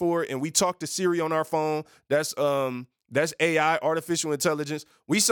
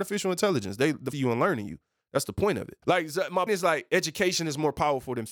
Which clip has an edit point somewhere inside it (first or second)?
second